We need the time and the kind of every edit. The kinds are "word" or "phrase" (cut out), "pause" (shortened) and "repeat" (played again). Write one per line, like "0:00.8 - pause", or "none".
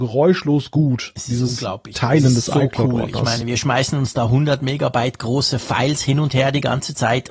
none